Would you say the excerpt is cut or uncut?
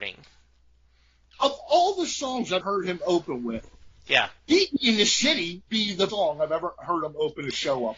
cut